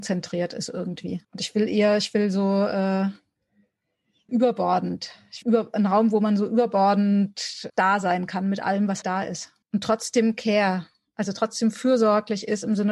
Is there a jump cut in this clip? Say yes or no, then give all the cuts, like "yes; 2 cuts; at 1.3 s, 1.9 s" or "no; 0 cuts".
yes; 6 cuts; at 1.2 s, 4.3 s, 5.4 s, 7.7 s, 9.0 s, 9.6 s